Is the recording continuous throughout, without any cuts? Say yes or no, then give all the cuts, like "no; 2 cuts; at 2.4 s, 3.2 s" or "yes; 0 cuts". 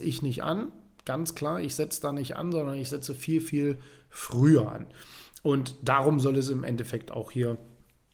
yes; 0 cuts